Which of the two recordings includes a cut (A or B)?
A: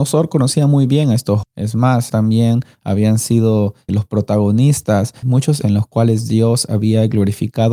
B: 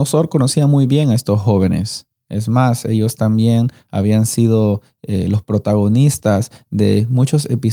A